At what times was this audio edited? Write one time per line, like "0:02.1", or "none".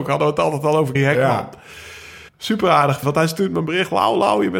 0:00.9
0:02.3
0:03.0